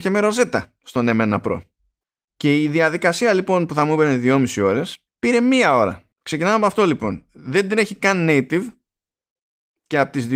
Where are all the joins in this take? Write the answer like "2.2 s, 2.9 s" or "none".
2.0 s, 5.1 s, 6.1 s